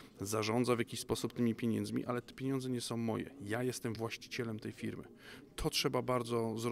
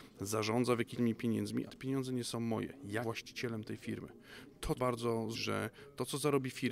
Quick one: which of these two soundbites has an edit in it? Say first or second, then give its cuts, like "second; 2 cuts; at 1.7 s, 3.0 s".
second; 5 cuts; at 0.9 s, 1.7 s, 3.0 s, 4.8 s, 5.3 s